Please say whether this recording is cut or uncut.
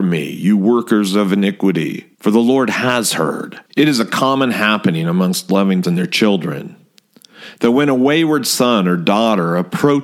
cut